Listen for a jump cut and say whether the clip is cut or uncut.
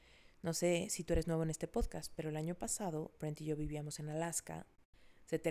uncut